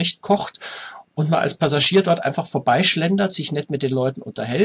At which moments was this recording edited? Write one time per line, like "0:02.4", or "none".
none